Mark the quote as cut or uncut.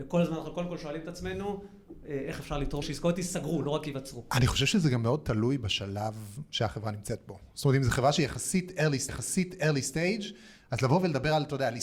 cut